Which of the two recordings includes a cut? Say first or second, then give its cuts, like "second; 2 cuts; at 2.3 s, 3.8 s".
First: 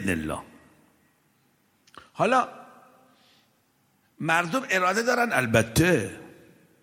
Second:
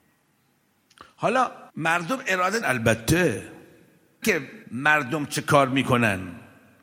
second; 4 cuts; at 1.7 s, 2.6 s, 4.2 s, 4.6 s